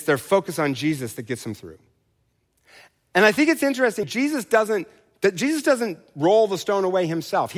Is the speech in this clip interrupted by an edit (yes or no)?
yes